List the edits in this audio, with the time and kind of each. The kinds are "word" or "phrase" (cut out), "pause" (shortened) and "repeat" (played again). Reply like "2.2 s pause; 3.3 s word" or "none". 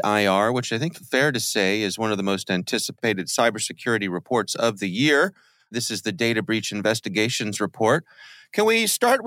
0.9 s word

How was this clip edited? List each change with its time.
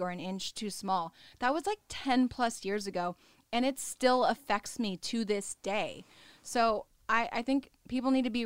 none

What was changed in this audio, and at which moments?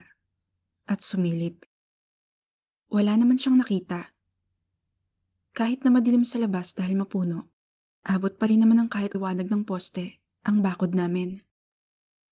9.1 s word

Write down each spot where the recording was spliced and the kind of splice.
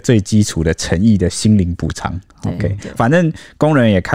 3.0 s word

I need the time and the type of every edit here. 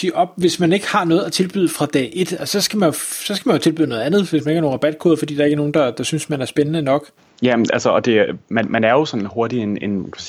7.2 s pause

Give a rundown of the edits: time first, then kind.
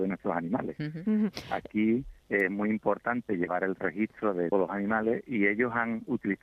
2.2 s pause; 4.5 s word

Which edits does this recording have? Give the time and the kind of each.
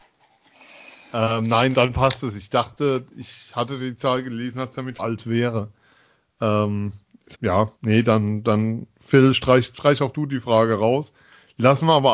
1.7 s word; 5.0 s phrase; 7.3 s word; 7.8 s pause

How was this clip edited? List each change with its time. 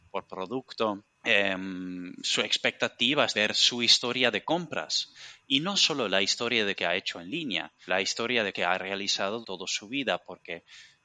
1.1 s pause; 3.3 s word; 6.8 s word; 7.9 s word; 8.5 s word; 9.4 s word

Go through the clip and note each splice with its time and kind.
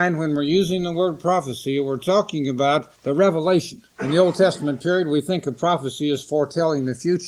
2.9 s pause; 3.9 s pause

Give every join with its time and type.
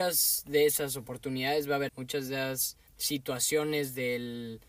1.9 s word; 2.9 s pause

